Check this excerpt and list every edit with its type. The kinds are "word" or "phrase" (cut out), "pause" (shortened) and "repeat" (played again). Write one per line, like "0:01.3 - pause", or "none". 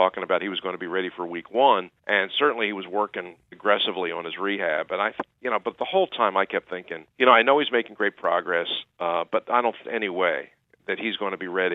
0:02.0 - pause
0:03.5 - word
0:07.1 - pause
0:09.8 - phrase

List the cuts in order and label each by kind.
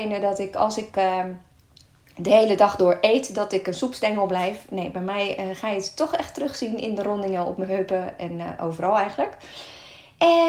none

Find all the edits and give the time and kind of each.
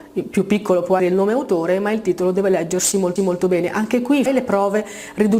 0:01.0 - word
0:03.2 - repeat
0:04.3 - word

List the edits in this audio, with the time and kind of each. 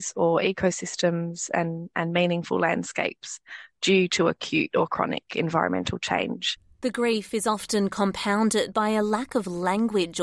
none

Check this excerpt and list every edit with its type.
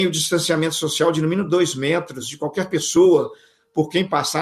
none

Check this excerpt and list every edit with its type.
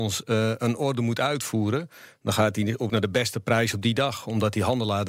0:02.9 - word

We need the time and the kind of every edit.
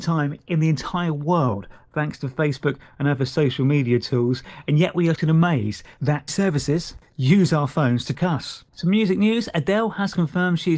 0:05.2 - word
0:06.3 - word
0:08.1 - word
0:08.7 - pause

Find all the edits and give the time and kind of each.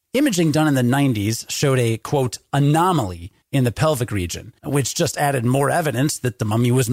0:04.6 - pause

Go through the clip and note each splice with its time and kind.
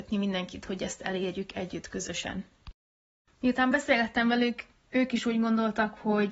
none

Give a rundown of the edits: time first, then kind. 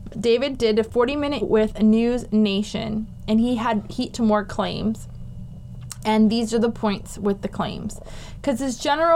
0:01.4 - word
0:04.1 - word

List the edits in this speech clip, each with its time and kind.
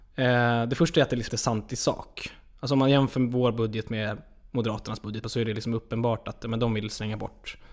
0:01.3 - word
0:05.2 - word

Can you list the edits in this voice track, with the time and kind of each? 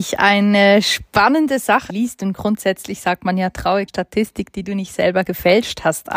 0:01.9 - phrase
0:03.9 - word

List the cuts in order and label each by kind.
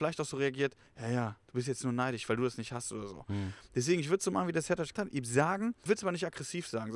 0:04.9 - word
0:05.9 - word

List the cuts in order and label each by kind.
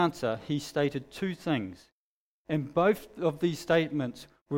none

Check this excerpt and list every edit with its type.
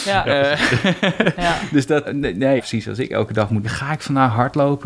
0:02.0 - word
0:02.6 - word
0:03.6 - word

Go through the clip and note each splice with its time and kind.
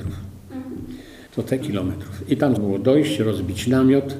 0:01.3 - pause
0:01.6 - word
0:02.6 - word

